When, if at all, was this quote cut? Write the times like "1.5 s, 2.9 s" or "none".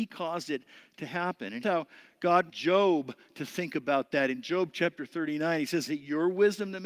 1.6 s, 2.5 s, 5.9 s